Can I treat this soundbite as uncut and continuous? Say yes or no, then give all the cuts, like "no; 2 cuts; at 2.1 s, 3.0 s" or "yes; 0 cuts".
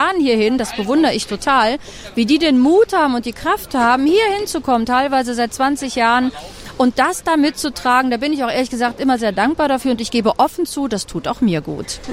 yes; 0 cuts